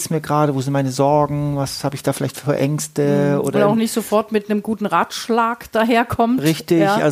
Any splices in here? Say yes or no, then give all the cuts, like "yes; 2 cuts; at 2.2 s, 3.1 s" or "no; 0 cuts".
no; 0 cuts